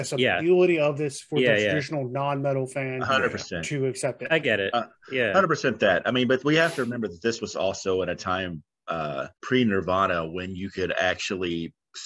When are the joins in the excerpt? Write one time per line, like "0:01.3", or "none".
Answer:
0:09.4